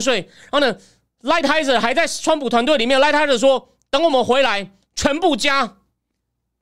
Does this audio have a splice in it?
no; 0 cuts

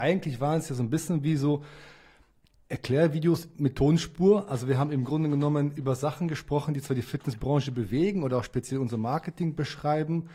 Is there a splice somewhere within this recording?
no; 0 cuts

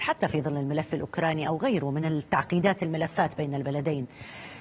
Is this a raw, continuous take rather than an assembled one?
yes; 0 cuts

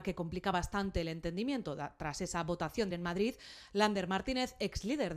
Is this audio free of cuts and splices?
no; 1 cut; at 2.9 s

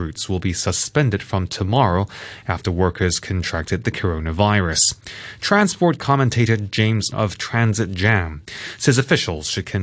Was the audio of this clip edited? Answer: yes; 1 cut; at 7.1 s

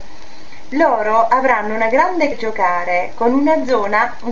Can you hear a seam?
yes; 1 cut; at 2.3 s

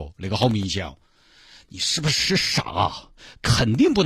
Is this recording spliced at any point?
no; 0 cuts

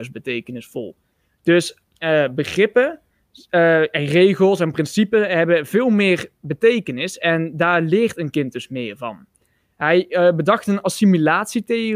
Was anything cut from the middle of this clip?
no; 0 cuts

